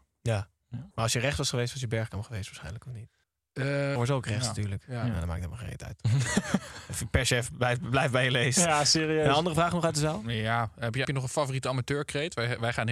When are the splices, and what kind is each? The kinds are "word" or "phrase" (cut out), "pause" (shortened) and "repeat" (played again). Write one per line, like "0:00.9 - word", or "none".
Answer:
0:00.9 - pause
0:03.2 - pause
0:04.0 - phrase
0:11.0 - word